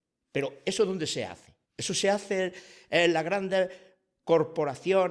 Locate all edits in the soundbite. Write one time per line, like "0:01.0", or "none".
0:01.6